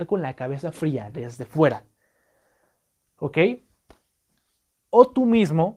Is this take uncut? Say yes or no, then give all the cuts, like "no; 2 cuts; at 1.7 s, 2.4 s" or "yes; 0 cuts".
yes; 0 cuts